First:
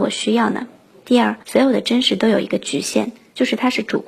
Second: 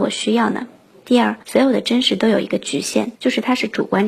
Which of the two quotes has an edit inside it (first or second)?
second